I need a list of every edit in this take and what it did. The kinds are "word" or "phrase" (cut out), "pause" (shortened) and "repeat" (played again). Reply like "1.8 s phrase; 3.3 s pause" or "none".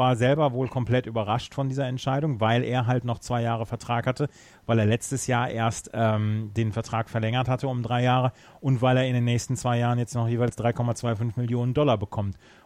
none